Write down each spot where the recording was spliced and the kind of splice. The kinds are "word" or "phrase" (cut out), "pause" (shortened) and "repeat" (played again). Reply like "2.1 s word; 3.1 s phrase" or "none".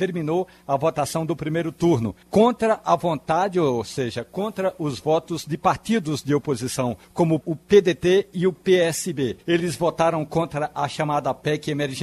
2.2 s pause; 7.0 s pause; 7.4 s word; 9.4 s pause